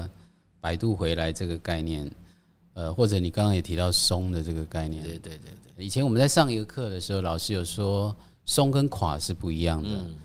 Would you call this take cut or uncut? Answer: uncut